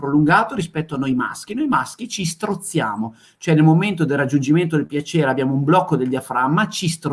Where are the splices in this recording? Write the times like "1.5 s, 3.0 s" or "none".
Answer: none